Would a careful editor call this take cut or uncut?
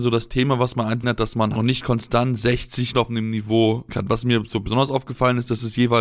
cut